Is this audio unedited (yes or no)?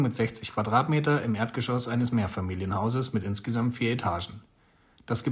yes